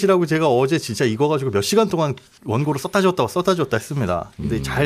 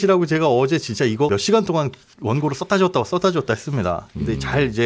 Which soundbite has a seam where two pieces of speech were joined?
second; 1 cut; at 1.3 s

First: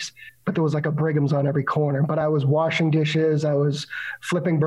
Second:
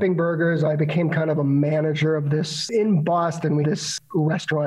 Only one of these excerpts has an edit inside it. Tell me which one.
second; 1 cut; at 3.6 s

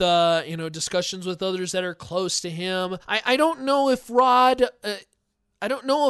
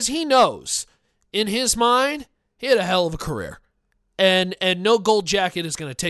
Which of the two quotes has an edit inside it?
first; 1 cut; at 3.0 s

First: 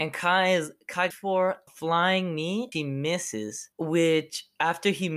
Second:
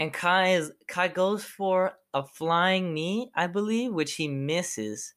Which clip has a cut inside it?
first; 4 cuts; at 1.1 s, 1.7 s, 2.7 s, 3.7 s

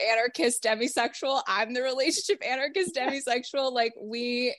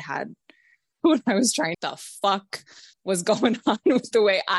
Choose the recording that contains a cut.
second; 3 cuts; at 1.0 s, 1.7 s, 2.9 s

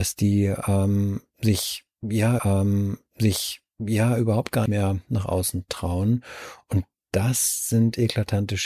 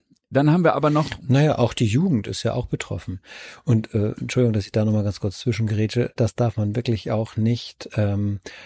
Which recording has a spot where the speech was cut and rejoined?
first; 2 cuts; at 2.4 s, 4.7 s

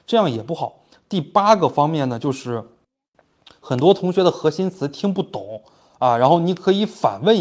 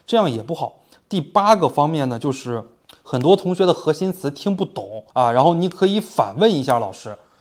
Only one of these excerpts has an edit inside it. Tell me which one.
second; 2 cuts; at 2.8 s, 5.1 s

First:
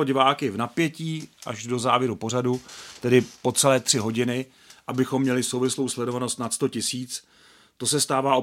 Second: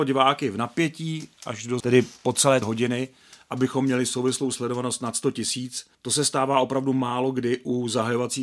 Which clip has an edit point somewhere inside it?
second; 3 cuts; at 1.8 s, 2.6 s, 5.9 s

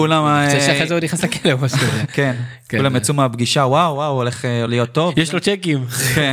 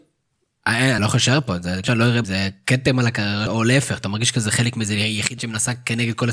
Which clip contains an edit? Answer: second; 5 cuts; at 1.0 s, 1.8 s, 2.2 s, 3.5 s, 5.4 s

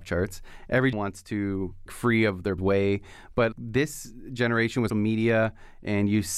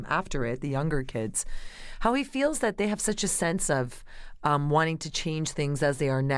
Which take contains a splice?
first; 5 cuts; at 0.9 s, 1.9 s, 2.6 s, 3.5 s, 4.9 s

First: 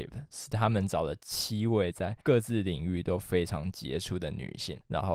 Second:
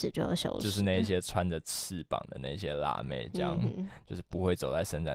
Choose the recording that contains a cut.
first; 1 cut; at 2.2 s

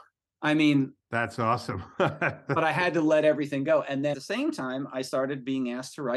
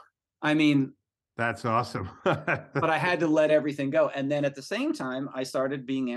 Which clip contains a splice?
first; 2 cuts; at 1.0 s, 4.1 s

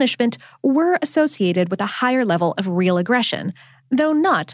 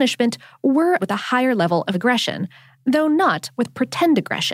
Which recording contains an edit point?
second; 2 cuts; at 1.0 s, 1.9 s

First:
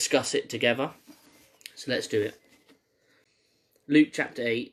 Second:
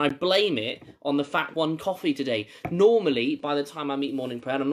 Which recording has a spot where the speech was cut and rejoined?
second; 1 cut; at 1.5 s

